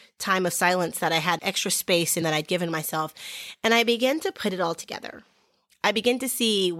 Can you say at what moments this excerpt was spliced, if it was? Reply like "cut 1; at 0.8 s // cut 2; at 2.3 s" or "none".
cut 1; at 1.4 s // cut 2; at 2.2 s